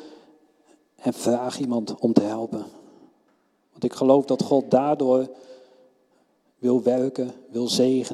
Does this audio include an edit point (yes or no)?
no